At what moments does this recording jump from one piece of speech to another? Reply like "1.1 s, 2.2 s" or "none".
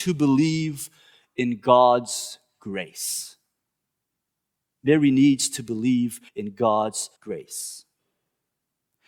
6.3 s, 7.2 s